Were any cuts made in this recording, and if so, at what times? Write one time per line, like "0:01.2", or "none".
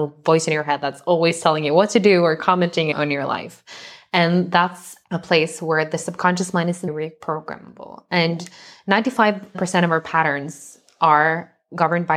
none